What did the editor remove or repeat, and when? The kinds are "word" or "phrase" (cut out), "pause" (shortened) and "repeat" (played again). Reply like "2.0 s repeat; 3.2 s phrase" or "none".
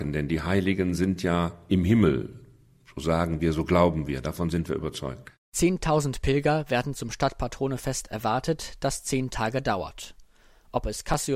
none